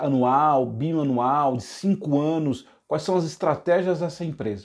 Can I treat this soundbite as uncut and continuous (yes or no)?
yes